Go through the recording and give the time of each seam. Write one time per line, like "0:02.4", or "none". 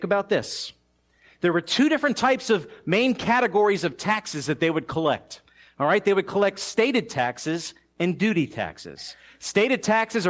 none